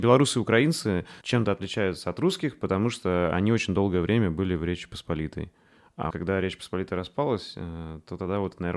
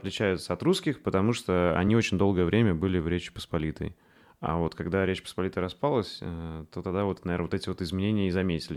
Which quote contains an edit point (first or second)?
first